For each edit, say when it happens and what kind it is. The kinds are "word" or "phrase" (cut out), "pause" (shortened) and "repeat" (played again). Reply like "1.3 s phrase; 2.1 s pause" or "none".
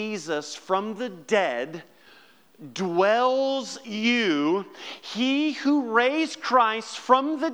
3.8 s word